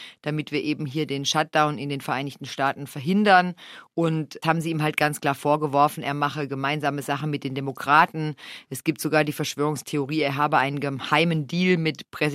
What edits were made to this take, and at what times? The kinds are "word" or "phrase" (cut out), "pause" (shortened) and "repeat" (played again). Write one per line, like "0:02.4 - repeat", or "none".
0:04.4 - phrase